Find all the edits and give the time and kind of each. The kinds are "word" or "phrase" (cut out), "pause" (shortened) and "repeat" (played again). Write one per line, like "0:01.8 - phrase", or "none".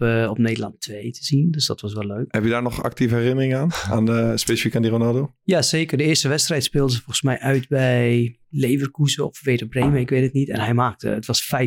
none